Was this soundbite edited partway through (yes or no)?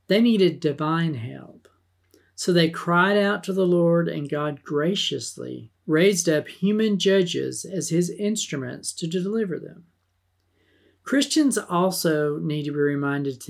yes